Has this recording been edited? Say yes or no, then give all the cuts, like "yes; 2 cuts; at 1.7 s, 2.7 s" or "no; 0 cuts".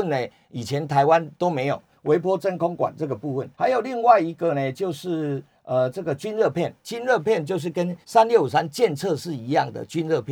yes; 2 cuts; at 3.5 s, 8.0 s